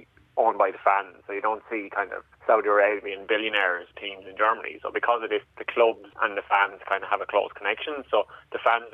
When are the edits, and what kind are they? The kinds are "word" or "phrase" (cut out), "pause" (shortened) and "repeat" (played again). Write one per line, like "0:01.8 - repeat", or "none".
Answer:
0:02.3 - pause
0:03.9 - word
0:05.4 - word
0:06.1 - pause